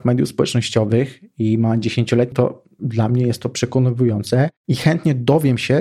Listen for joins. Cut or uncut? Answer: cut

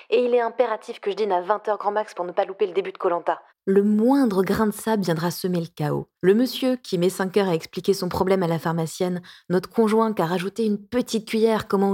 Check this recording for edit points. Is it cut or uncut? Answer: cut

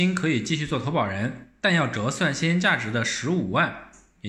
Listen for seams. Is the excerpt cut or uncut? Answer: cut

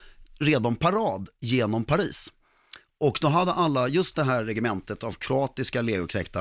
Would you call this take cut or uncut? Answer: uncut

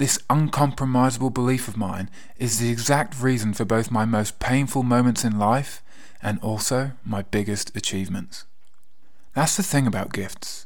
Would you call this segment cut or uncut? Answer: uncut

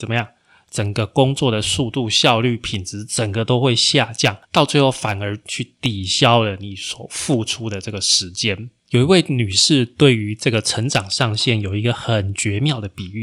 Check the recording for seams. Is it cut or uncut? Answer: cut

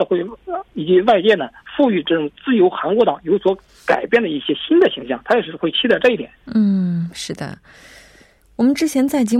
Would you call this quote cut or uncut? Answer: cut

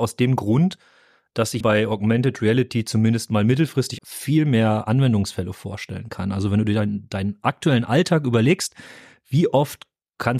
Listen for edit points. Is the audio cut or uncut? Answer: cut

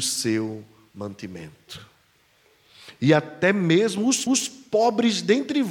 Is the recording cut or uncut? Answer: cut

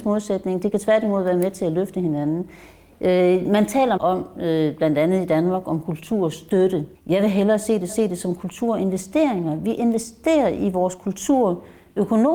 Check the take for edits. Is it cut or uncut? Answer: cut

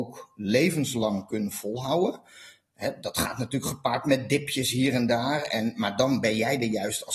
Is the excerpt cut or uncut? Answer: uncut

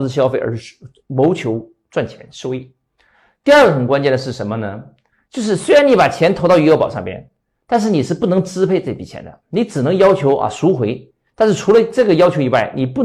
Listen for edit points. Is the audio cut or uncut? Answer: uncut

